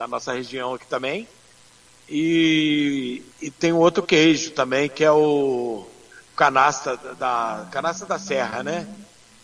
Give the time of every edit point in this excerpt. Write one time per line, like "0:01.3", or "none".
0:03.3

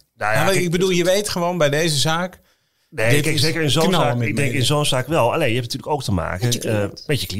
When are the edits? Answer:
none

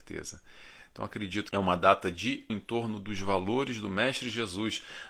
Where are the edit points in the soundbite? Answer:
0:01.5
0:02.5

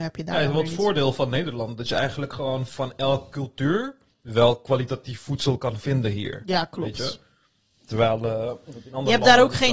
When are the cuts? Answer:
none

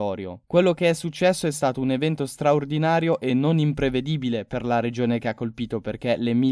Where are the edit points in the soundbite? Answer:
none

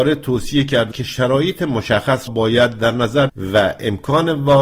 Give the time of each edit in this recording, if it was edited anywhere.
0:00.9
0:02.3
0:03.3

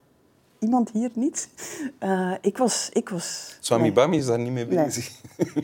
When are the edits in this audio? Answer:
none

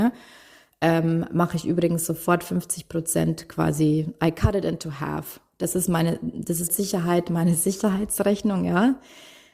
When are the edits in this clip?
0:06.7

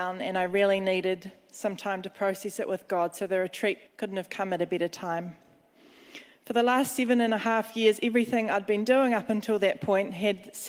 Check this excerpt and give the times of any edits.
0:03.9

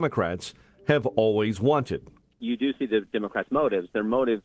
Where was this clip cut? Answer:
none

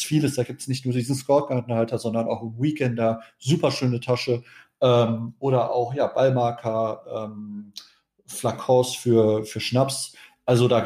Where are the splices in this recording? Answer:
none

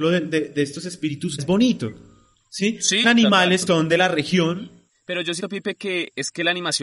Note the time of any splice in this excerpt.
0:01.4
0:03.0
0:03.7
0:05.4

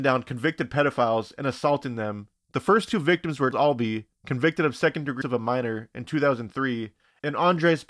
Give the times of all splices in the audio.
0:03.5
0:05.2

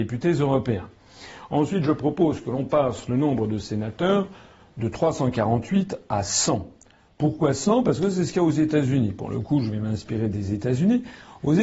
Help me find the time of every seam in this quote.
none

